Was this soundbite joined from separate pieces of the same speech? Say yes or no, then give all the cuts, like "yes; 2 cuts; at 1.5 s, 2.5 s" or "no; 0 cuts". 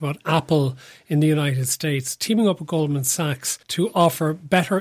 yes; 1 cut; at 3.6 s